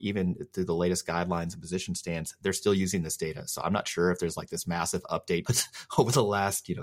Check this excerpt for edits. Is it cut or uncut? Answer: cut